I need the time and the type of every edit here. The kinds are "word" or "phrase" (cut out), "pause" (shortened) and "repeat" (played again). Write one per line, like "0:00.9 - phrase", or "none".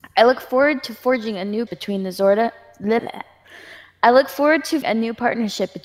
0:01.7 - word
0:03.0 - word
0:04.8 - word